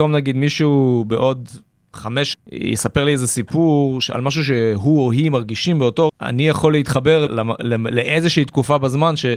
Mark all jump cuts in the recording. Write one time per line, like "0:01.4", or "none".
0:02.3
0:06.1
0:07.3